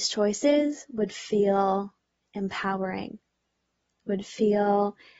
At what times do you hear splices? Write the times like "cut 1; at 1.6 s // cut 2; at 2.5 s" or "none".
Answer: none

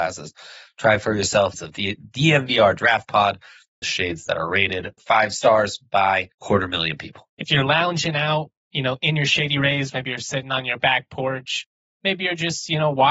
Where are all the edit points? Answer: cut 1; at 1.5 s // cut 2; at 3.8 s // cut 3; at 5.0 s // cut 4; at 6.3 s // cut 5; at 7.3 s // cut 6; at 8.6 s

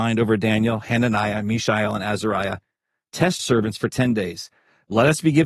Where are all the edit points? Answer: cut 1; at 3.4 s

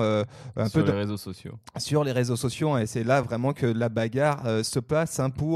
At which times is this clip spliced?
none

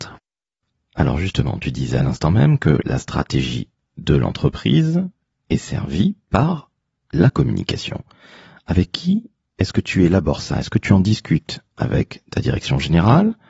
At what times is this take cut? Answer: none

